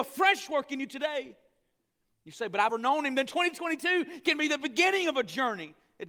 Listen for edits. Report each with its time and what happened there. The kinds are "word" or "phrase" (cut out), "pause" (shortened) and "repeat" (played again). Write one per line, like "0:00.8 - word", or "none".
0:02.7 - word